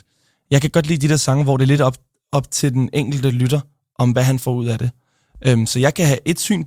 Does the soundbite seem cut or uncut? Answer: uncut